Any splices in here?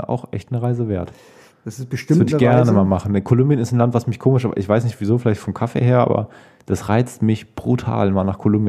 no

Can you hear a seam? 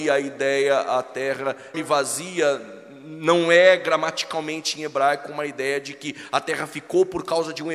yes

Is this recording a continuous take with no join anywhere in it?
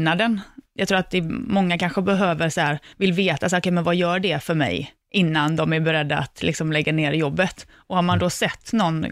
no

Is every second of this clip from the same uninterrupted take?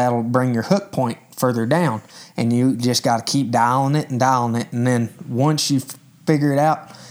yes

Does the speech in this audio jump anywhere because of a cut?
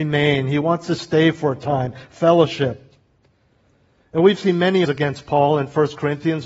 yes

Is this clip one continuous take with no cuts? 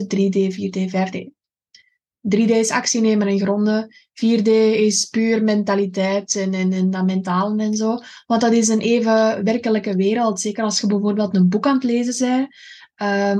yes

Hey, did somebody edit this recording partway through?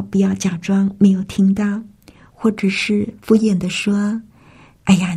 no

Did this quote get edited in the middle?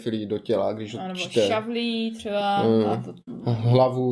no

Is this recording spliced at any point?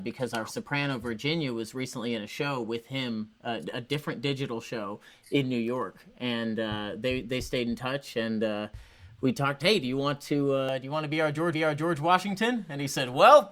yes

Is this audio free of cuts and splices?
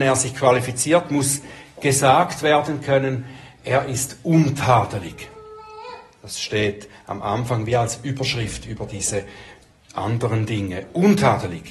yes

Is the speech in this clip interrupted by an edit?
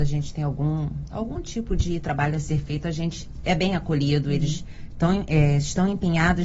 no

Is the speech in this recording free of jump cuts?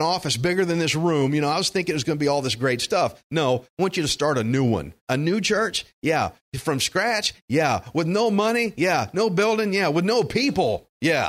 no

